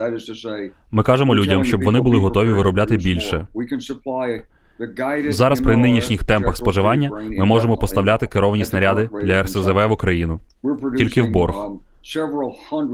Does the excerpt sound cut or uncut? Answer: uncut